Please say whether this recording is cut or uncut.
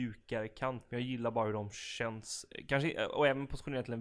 uncut